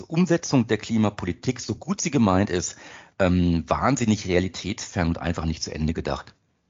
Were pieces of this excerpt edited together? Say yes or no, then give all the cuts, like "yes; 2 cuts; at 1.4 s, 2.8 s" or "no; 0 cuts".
no; 0 cuts